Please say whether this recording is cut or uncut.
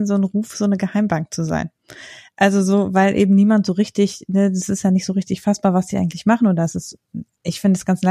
uncut